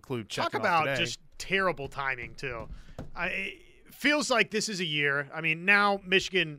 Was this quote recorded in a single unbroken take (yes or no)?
yes